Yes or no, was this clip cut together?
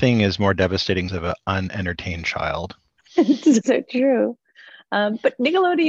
yes